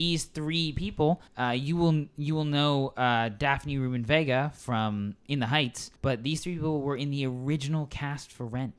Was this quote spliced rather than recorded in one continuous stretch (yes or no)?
yes